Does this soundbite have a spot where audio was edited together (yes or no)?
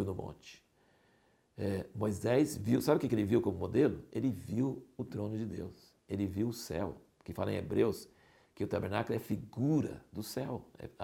no